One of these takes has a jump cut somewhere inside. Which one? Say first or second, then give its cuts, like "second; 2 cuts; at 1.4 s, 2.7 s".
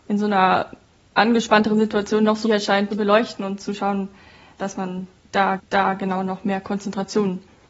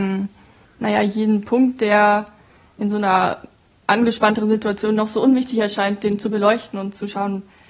first; 4 cuts; at 2.4 s, 2.9 s, 4.6 s, 5.6 s